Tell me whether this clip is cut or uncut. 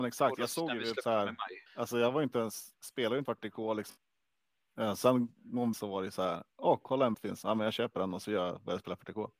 cut